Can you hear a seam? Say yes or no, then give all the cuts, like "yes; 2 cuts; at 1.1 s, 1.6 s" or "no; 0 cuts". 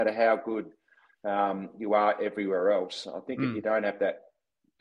no; 0 cuts